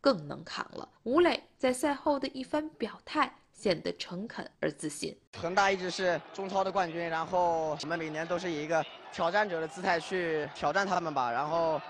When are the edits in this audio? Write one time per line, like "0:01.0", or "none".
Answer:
0:01.0
0:04.5
0:05.3